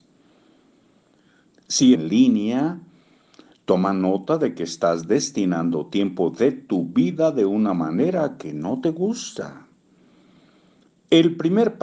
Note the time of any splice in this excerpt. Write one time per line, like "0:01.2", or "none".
0:02.0